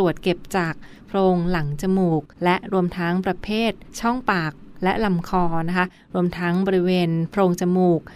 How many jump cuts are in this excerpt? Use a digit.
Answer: 1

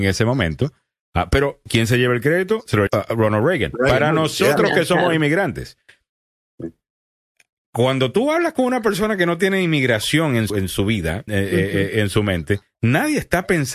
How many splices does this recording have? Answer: 3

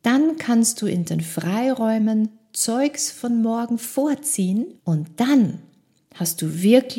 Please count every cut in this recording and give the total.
1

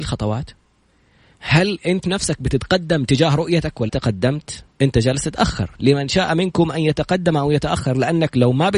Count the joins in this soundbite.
2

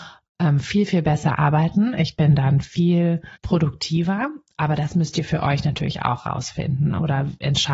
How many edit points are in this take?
1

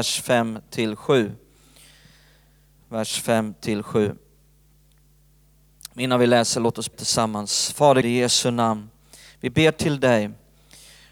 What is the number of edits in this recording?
2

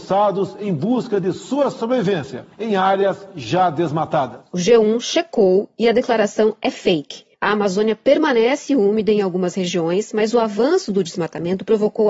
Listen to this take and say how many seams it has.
2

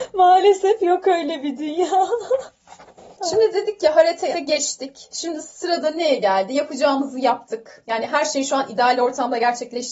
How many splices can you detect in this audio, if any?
1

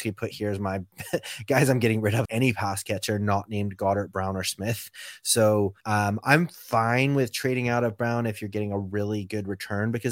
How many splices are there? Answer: 2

